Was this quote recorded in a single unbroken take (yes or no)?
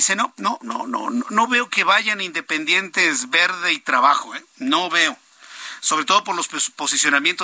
yes